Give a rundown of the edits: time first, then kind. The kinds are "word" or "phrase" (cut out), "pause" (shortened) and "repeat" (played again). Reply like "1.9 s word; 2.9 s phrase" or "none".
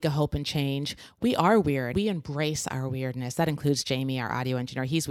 1.9 s word